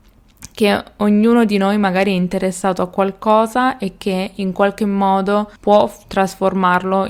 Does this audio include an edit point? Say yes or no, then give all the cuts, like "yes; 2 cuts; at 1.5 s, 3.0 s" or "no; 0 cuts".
yes; 1 cut; at 5.6 s